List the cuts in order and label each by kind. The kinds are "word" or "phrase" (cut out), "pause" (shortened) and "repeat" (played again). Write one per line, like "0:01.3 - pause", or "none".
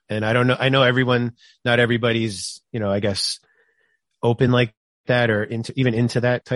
none